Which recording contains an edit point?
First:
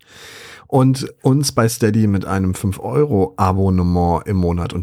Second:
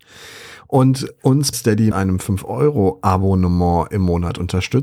second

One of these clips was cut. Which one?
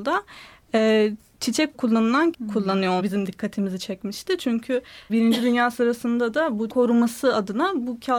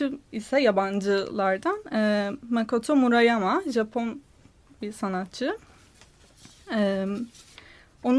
first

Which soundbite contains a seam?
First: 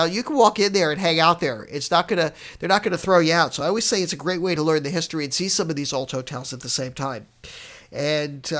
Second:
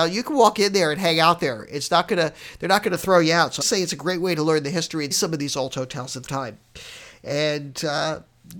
second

